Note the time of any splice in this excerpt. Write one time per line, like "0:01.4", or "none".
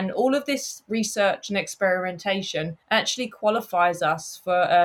0:02.8